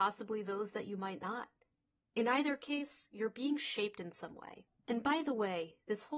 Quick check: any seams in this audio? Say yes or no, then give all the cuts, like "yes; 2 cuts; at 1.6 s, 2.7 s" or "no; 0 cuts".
no; 0 cuts